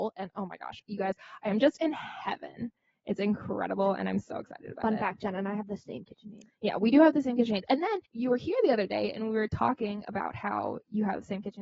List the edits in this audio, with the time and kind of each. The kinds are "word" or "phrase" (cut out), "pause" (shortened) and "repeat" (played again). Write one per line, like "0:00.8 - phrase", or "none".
0:08.1 - pause

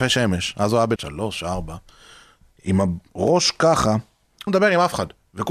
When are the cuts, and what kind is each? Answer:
0:01.0 - word
0:04.5 - word

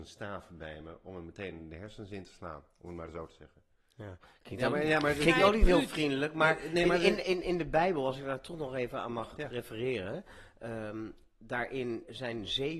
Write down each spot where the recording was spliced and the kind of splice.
none

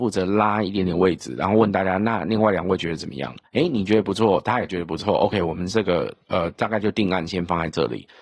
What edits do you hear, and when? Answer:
0:03.5 - pause

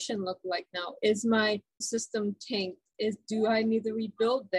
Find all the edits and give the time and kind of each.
0:01.8 - word

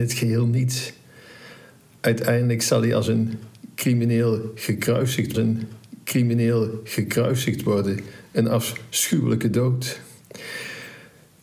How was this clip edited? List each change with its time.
0:05.3 - repeat

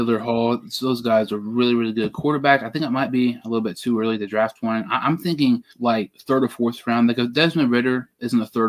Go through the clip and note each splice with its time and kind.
0:05.7 - pause

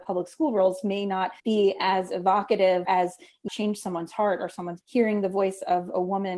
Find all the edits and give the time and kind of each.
0:01.4 - pause
0:02.8 - word
0:03.5 - phrase
0:04.8 - phrase

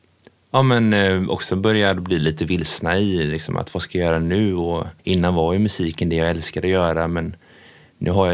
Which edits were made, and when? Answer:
0:05.0 - pause

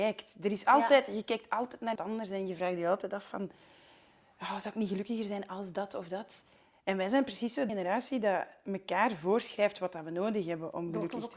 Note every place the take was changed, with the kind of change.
0:02.0 - word
0:07.7 - word

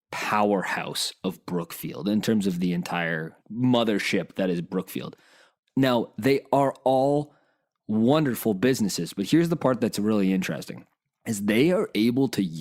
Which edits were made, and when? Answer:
none

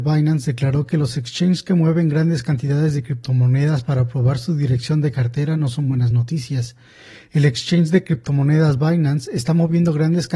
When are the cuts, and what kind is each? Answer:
none

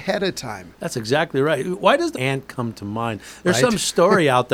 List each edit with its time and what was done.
0:02.1 - phrase

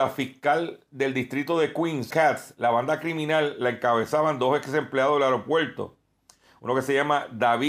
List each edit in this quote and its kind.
0:02.1 - word

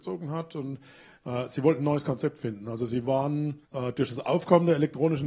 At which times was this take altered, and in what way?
0:03.6 - pause

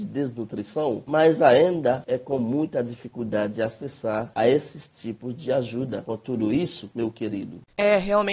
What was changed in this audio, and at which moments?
none

